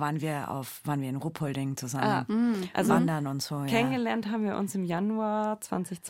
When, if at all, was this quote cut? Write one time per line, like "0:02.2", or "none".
none